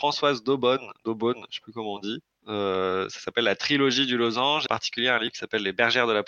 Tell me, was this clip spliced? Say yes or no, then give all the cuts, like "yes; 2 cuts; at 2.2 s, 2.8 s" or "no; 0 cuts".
yes; 1 cut; at 4.7 s